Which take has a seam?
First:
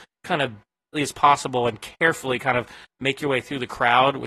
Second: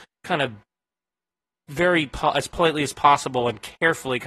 first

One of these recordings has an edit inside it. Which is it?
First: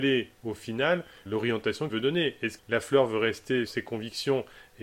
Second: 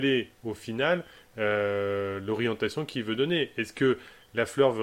first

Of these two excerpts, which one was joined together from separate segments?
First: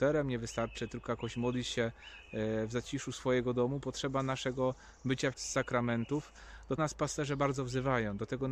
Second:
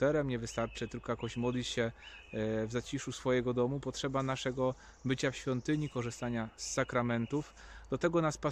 first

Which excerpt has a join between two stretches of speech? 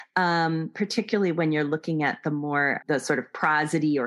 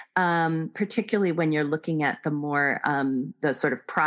first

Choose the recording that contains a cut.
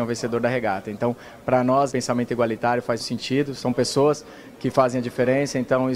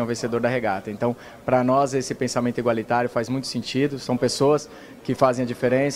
first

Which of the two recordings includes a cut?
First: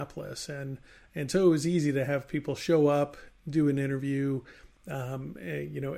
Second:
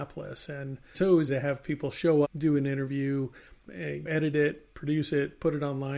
second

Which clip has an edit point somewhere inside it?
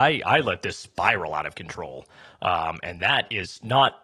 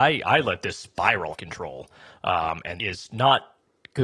second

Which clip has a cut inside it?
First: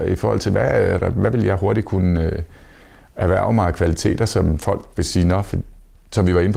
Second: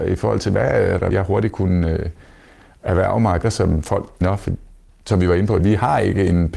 second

